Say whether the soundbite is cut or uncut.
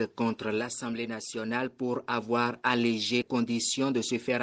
cut